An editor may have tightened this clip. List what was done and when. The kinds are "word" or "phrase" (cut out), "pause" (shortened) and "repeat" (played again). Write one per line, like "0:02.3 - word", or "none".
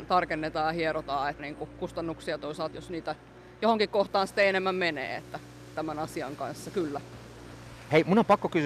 0:01.4 - word
0:02.7 - word
0:05.8 - word